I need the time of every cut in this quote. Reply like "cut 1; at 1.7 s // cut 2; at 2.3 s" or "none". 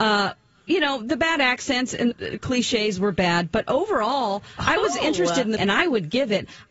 cut 1; at 2.1 s // cut 2; at 5.6 s